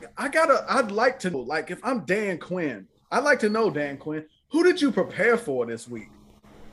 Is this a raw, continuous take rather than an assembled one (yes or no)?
no